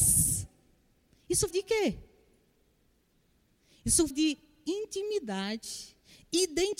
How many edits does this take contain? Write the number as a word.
two